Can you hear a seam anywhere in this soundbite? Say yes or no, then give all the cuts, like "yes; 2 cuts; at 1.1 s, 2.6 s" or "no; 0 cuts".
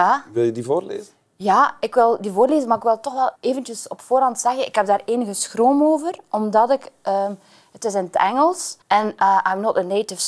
yes; 2 cuts; at 3.4 s, 8.8 s